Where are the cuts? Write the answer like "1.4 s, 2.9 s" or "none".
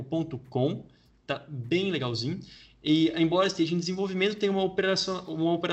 none